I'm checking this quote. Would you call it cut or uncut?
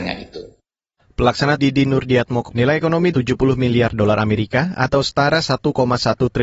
cut